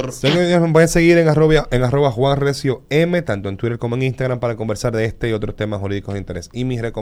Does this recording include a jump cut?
no; 0 cuts

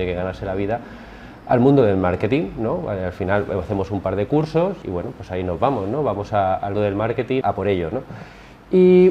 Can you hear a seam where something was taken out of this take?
yes; 3 cuts; at 4.8 s, 6.7 s, 7.4 s

